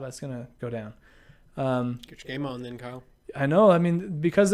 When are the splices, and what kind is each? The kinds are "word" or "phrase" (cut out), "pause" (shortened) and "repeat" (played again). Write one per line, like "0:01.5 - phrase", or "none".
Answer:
none